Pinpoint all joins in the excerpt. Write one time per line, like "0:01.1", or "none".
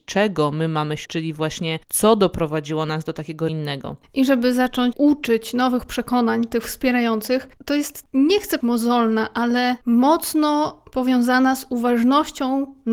0:01.1
0:01.8
0:03.5
0:04.9
0:07.5
0:08.0
0:08.6
0:09.8

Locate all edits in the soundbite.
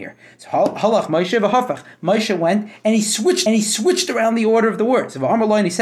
0:03.5

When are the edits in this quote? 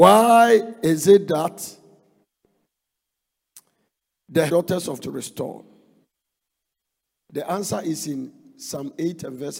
0:04.5
0:05.0

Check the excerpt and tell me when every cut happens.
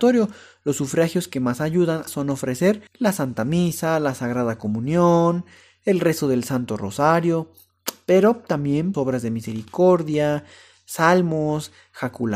0:02.1
0:02.9
0:08.9

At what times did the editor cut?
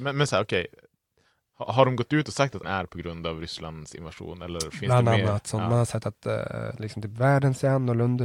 0:02.6

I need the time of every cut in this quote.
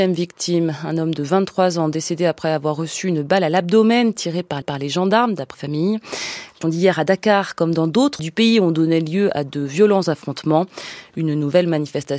0:04.6
0:05.5
0:06.6
0:08.2

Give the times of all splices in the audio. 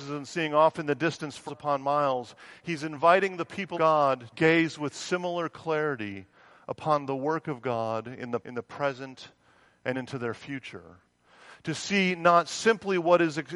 0:01.5
0:03.7
0:04.3
0:08.4
0:09.9

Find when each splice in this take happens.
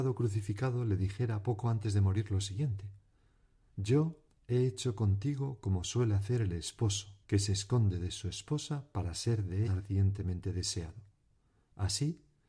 0:04.3
0:07.2
0:09.6

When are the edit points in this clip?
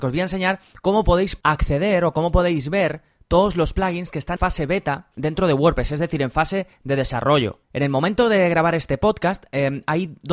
0:04.4

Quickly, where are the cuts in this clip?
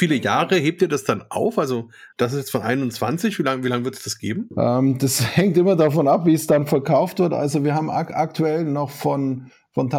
0:02.1

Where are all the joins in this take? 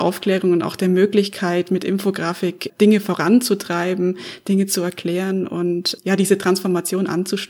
0:02.7
0:06.0

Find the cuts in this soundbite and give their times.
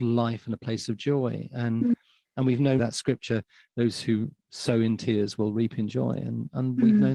0:02.8

